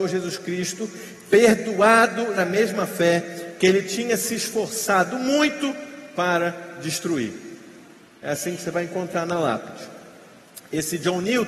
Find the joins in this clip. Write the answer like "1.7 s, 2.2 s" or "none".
2.4 s